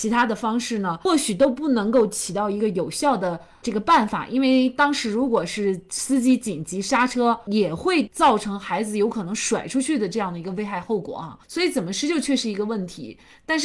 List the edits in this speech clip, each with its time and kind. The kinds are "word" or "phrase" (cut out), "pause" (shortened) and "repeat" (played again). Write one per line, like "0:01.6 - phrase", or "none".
0:11.4 - pause